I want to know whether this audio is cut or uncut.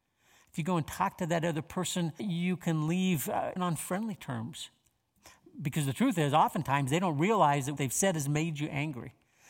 cut